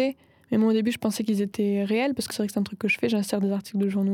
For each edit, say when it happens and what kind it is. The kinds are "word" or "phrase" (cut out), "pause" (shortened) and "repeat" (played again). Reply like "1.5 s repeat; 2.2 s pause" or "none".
2.3 s word